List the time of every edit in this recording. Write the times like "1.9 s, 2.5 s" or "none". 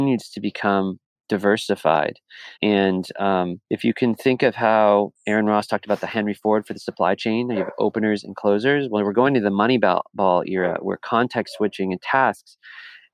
2.5 s